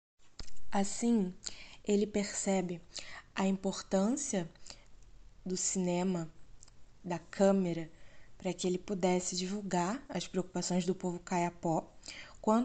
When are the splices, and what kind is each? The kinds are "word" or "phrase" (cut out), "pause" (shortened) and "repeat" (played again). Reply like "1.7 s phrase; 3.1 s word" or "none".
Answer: none